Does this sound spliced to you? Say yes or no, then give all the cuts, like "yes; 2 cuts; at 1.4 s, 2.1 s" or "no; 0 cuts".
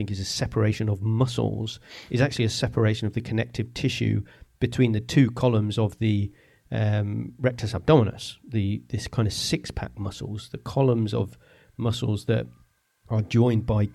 no; 0 cuts